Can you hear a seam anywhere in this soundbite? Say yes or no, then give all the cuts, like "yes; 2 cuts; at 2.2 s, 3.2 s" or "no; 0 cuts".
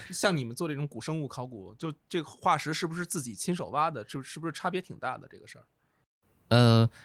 yes; 1 cut; at 2.0 s